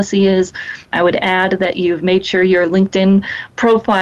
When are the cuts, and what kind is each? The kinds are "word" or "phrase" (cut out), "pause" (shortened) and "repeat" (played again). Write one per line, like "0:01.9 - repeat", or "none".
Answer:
none